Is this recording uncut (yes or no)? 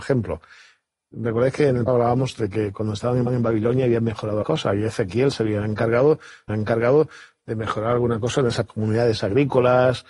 no